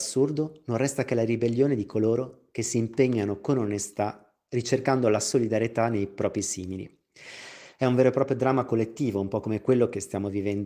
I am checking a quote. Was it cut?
no; 0 cuts

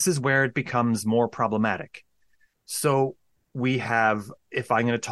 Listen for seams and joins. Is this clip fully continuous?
yes; 0 cuts

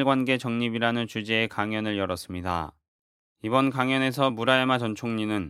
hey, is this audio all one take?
yes; 0 cuts

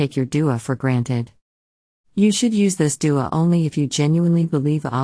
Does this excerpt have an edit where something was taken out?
no; 0 cuts

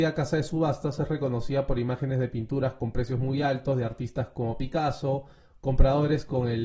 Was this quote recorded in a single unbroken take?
yes; 0 cuts

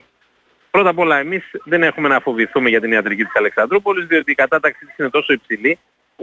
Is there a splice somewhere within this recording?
no; 0 cuts

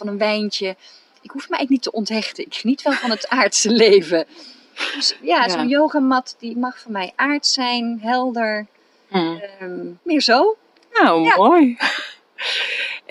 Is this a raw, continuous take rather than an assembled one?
no; 1 cut; at 10.0 s

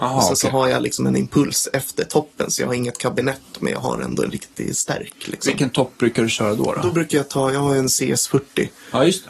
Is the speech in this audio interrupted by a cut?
no; 0 cuts

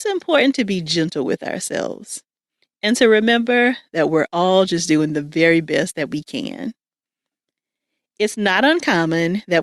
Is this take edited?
no; 0 cuts

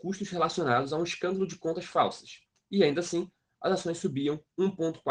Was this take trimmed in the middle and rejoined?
no; 0 cuts

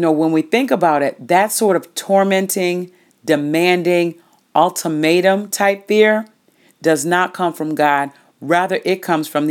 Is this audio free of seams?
yes; 0 cuts

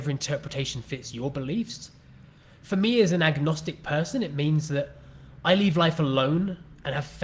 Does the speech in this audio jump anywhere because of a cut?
no; 0 cuts

